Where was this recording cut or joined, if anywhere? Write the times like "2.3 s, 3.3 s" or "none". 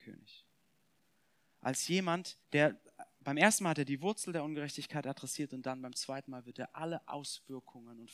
2.4 s